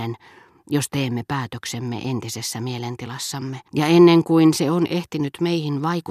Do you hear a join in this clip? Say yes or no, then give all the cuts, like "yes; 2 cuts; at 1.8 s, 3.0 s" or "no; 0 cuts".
yes; 1 cut; at 3.7 s